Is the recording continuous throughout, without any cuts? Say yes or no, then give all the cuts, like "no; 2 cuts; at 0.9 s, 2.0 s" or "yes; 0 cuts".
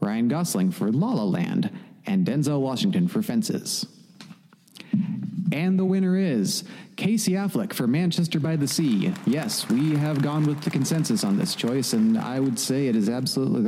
yes; 0 cuts